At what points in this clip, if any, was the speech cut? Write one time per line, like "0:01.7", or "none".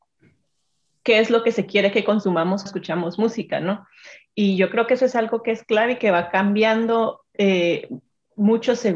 0:02.7
0:07.3